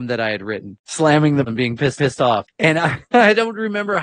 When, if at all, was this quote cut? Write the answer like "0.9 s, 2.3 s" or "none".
1.5 s, 2.0 s, 3.0 s